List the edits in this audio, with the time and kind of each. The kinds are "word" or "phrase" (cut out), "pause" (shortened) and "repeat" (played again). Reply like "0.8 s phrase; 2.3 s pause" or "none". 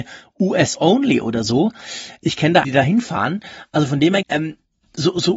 2.6 s word; 4.2 s word